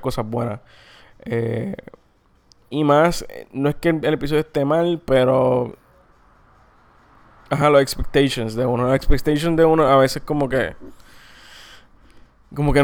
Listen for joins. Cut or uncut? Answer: uncut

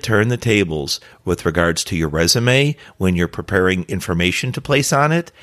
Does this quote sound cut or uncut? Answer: uncut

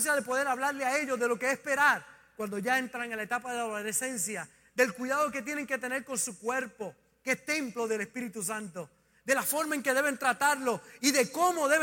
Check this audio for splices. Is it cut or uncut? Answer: uncut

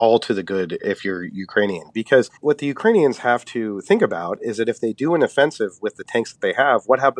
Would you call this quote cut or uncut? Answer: cut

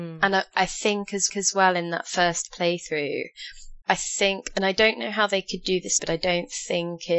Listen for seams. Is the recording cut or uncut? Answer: cut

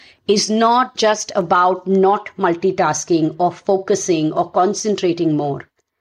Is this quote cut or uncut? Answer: uncut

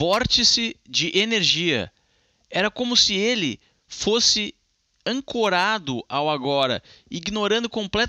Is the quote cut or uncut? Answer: uncut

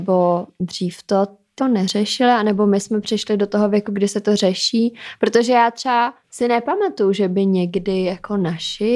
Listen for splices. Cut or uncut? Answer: cut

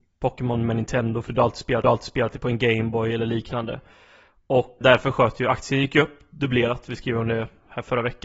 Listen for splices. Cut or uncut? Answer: cut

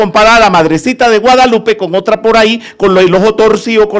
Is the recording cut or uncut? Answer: uncut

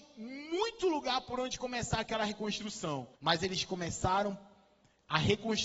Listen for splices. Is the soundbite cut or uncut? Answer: cut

